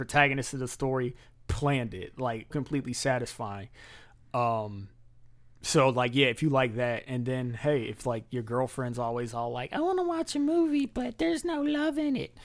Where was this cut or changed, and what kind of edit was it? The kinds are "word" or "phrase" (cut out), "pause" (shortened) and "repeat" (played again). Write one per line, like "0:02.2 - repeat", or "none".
0:02.5 - word